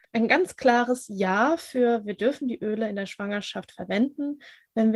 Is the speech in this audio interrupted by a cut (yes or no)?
no